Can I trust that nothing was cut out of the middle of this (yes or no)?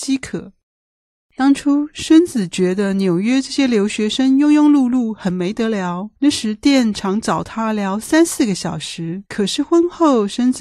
no